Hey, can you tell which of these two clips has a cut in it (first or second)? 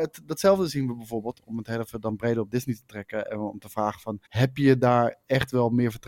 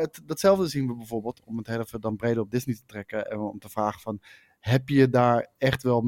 first